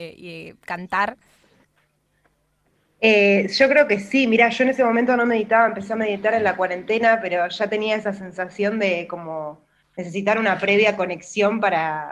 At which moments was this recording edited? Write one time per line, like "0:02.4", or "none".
none